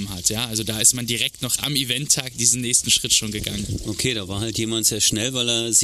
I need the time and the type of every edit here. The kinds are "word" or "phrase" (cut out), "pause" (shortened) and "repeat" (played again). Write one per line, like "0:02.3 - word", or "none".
none